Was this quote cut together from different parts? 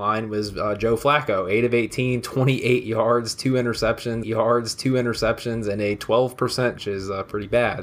yes; 2 cuts; at 4.2 s, 6.8 s

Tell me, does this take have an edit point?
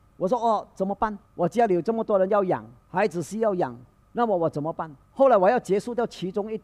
yes; 4 cuts; at 1.2 s, 2.8 s, 3.9 s, 5.0 s

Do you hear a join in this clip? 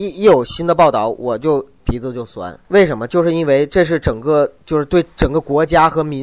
yes; 1 cut; at 2.6 s

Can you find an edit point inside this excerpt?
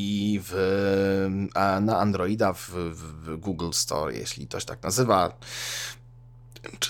no; 0 cuts

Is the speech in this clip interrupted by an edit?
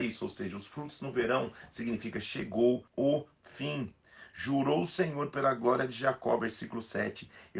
yes; 1 cut; at 2.9 s

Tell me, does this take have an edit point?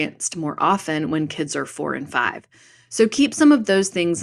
no; 0 cuts

